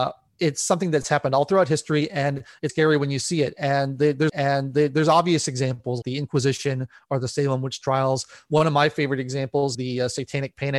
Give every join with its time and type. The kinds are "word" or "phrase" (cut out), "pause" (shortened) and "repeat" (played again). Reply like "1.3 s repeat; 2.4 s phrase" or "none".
2.7 s word; 4.3 s repeat; 6.0 s word; 9.7 s word